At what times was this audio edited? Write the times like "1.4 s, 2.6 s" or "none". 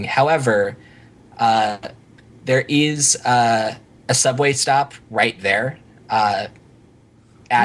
none